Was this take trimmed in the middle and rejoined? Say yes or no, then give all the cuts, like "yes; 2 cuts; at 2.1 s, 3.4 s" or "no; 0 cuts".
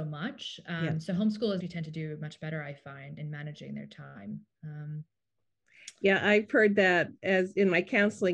yes; 2 cuts; at 1.6 s, 3.2 s